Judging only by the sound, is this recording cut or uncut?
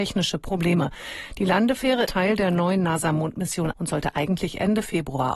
cut